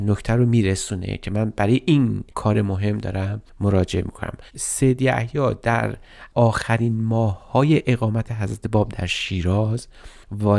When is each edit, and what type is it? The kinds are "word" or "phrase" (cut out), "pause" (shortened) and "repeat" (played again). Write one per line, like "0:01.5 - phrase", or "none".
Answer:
0:02.3 - pause
0:04.5 - pause